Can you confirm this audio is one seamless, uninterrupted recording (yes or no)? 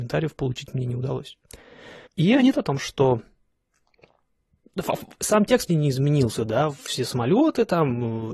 no